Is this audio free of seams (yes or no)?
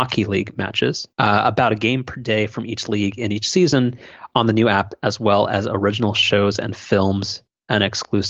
no